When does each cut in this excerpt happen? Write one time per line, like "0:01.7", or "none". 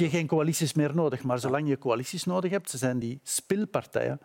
none

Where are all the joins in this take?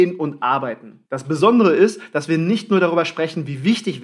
0:01.0

